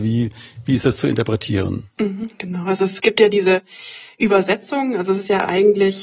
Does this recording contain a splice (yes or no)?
no